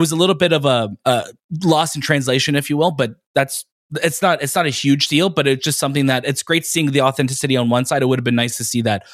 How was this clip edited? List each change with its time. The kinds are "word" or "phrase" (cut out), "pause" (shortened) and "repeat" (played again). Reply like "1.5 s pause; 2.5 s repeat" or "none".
1.0 s pause